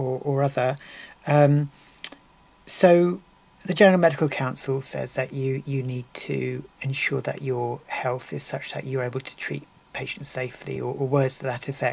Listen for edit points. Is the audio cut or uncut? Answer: uncut